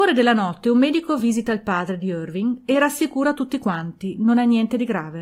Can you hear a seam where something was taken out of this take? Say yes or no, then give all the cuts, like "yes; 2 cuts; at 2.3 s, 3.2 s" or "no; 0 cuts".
no; 0 cuts